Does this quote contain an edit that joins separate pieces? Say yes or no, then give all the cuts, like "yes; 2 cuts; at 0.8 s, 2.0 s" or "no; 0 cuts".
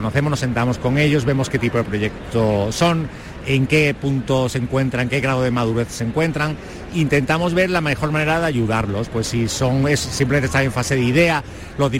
no; 0 cuts